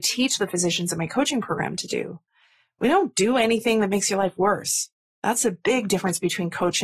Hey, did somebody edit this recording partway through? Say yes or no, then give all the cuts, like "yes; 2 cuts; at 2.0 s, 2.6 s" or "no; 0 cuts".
no; 0 cuts